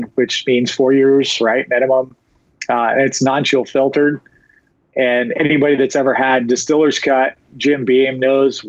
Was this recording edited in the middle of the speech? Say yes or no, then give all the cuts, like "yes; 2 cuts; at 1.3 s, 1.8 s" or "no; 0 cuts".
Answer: no; 0 cuts